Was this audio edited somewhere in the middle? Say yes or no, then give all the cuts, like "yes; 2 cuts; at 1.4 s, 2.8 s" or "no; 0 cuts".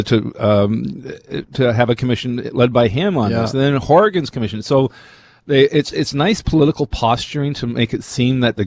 no; 0 cuts